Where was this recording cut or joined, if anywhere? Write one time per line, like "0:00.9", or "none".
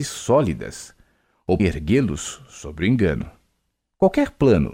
0:01.6